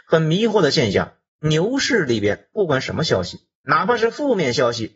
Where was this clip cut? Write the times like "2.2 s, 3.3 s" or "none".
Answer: 1.3 s